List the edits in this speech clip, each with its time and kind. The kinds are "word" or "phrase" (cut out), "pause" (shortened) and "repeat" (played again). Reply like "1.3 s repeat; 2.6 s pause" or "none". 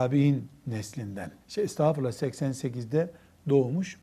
1.4 s pause